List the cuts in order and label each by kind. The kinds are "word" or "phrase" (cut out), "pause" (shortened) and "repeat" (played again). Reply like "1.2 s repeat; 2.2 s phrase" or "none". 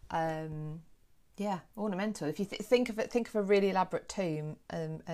1.0 s pause